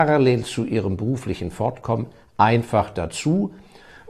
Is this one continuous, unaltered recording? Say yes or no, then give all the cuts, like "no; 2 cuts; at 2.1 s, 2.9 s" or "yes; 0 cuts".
yes; 0 cuts